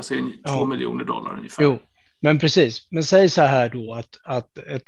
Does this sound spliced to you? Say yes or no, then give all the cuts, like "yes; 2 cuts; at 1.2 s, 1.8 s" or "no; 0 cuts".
no; 0 cuts